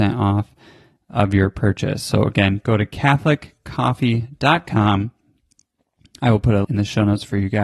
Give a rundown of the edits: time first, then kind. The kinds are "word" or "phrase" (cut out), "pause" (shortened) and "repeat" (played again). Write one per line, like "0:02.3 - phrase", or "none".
0:06.6 - word

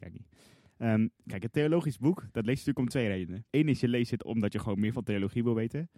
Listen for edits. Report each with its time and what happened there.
0:01.2 - pause
0:03.5 - pause

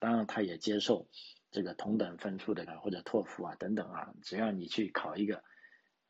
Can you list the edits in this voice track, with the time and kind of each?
0:02.7 - word

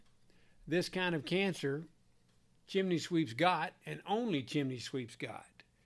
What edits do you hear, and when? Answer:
none

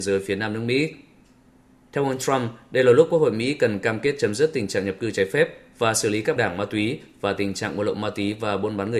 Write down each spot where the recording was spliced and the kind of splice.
0:06.4 - word

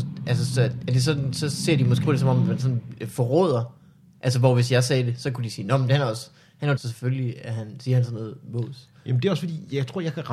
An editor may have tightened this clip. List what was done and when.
0:02.0 - word
0:06.8 - word

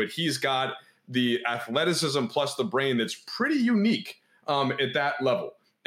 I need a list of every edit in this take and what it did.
none

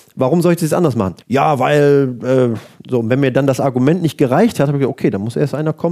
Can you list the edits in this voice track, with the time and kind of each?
0:01.2 - pause

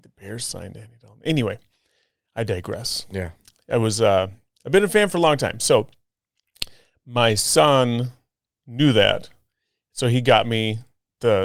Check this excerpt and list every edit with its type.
none

